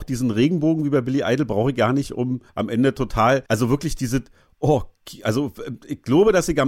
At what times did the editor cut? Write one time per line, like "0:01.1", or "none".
0:02.5
0:03.5